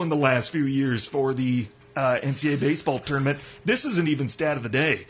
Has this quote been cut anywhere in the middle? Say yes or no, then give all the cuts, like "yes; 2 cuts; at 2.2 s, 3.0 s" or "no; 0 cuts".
no; 0 cuts